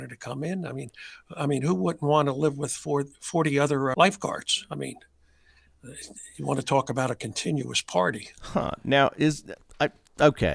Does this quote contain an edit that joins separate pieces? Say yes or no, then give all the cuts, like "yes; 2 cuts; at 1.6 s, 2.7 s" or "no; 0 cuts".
yes; 1 cut; at 3.9 s